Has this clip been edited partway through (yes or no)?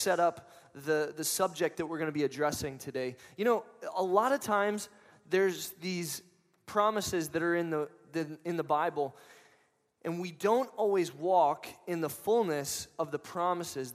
no